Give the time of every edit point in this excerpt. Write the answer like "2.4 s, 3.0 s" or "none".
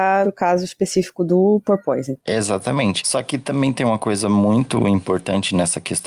none